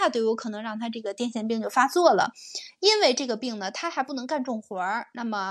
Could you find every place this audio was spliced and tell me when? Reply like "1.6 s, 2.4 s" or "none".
none

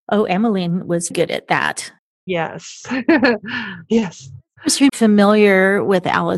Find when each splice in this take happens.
1.1 s, 2.0 s, 4.9 s

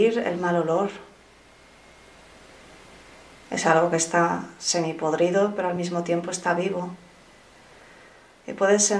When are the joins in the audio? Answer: none

